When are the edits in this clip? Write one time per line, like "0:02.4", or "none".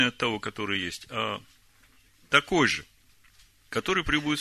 none